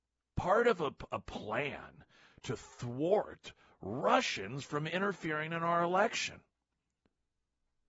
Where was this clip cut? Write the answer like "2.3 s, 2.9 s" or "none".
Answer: none